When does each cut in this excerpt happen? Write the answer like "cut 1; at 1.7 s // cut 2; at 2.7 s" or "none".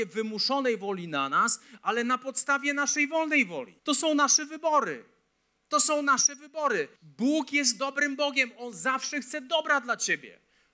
cut 1; at 3.8 s // cut 2; at 5.3 s // cut 3; at 7.0 s